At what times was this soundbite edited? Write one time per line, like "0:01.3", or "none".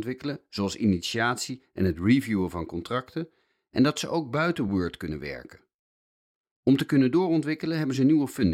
none